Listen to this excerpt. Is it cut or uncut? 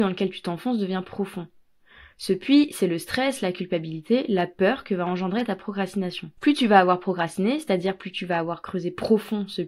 cut